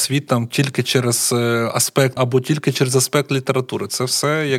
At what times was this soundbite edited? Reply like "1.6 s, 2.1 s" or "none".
2.2 s